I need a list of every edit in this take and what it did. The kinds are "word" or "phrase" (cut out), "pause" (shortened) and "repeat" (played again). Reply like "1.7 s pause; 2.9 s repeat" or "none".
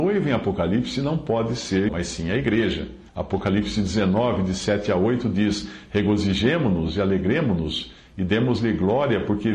1.9 s word; 3.1 s pause